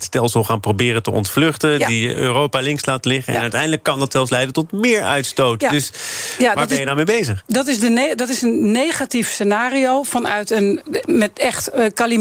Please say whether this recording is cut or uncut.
uncut